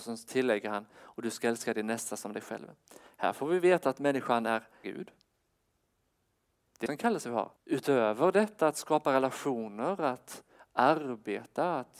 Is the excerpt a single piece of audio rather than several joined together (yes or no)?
no